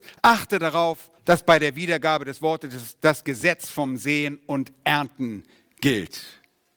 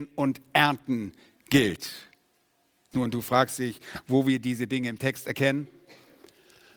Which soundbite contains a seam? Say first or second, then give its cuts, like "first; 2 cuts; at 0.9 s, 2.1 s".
first; 1 cut; at 1.2 s